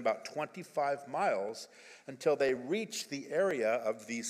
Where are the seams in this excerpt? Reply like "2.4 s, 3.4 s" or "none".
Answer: none

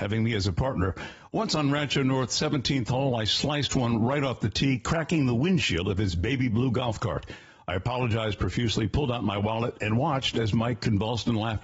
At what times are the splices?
none

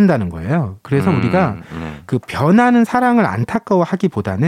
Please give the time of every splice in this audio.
none

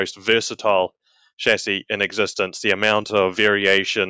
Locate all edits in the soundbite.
none

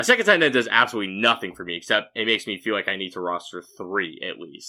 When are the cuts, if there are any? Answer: none

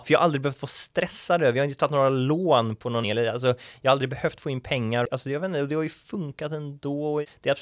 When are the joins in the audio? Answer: 3.0 s

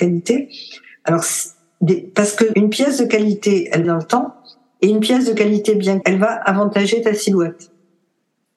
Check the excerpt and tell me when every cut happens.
2.5 s, 3.8 s, 6.0 s

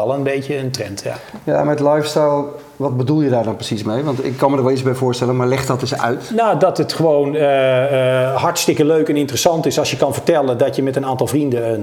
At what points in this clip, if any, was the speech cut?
none

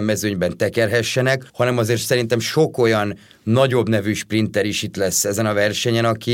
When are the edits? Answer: 1.5 s

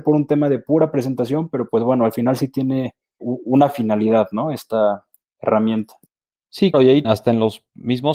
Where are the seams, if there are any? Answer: 3.2 s, 6.7 s, 7.0 s

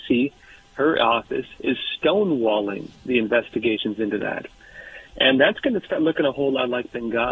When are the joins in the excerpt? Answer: 3.0 s

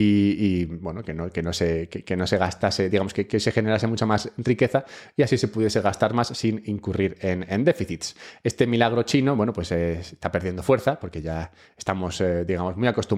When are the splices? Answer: none

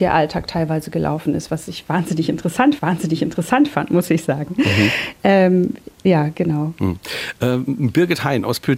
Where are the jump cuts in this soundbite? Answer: 2.8 s

